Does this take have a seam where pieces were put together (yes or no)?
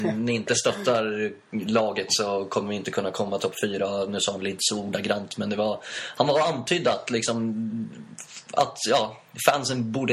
no